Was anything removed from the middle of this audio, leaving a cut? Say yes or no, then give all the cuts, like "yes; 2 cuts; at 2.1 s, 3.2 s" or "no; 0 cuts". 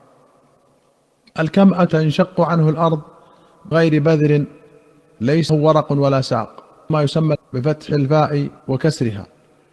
yes; 6 cuts; at 1.9 s, 3.7 s, 5.5 s, 6.9 s, 7.3 s, 8.6 s